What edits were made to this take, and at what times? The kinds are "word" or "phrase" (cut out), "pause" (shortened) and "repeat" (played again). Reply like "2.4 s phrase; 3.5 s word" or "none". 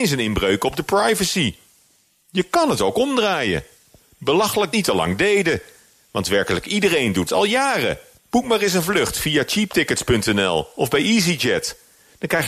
4.7 s phrase; 7.3 s word; 8.2 s pause